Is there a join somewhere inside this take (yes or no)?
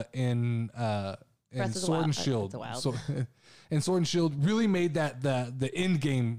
no